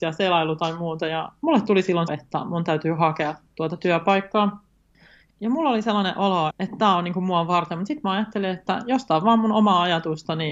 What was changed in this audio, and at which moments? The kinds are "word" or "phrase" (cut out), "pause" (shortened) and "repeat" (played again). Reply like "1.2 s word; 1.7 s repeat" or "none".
2.1 s phrase; 5.3 s phrase; 6.5 s word